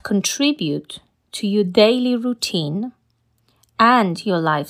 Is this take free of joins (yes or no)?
yes